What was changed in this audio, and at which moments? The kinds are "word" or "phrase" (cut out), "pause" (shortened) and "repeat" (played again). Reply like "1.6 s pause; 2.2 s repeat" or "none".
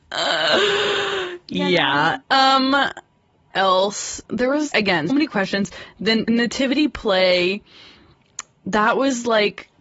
2.2 s pause; 3.5 s word; 4.2 s pause; 4.7 s word; 5.1 s word; 6.3 s word